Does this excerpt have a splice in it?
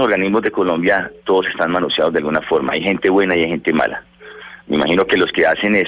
yes; 1 cut; at 4.6 s

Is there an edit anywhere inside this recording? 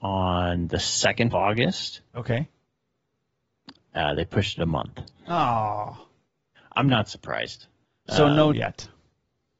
yes; 4 cuts; at 1.3 s, 2.1 s, 7.8 s, 8.5 s

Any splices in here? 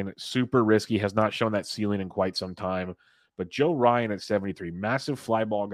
no; 0 cuts

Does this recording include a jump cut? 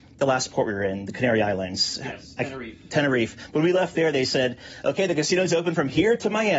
no; 0 cuts

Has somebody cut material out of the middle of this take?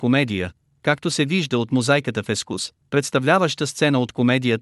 no; 0 cuts

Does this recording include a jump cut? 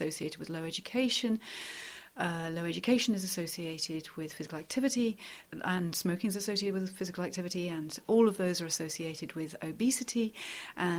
no; 0 cuts

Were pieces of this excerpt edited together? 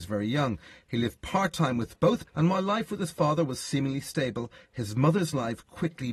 yes; 1 cut; at 2.3 s

